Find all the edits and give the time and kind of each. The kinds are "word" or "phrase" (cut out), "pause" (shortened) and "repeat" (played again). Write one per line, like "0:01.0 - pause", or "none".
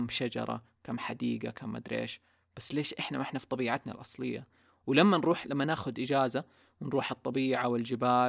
none